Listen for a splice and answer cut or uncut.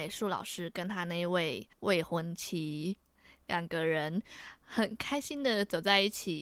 cut